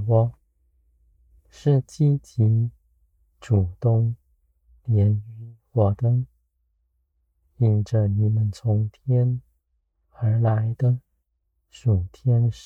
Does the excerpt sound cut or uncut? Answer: uncut